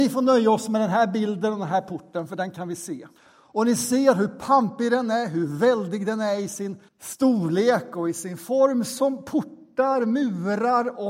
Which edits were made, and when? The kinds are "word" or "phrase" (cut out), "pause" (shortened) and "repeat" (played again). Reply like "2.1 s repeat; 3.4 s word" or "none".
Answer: 3.2 s pause; 6.9 s pause